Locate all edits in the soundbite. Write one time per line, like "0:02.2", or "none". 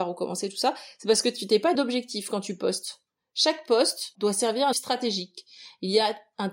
0:01.7
0:04.1
0:04.7